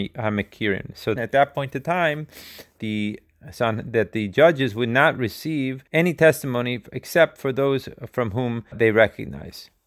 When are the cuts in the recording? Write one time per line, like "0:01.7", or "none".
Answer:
0:01.2
0:02.8
0:05.9
0:08.7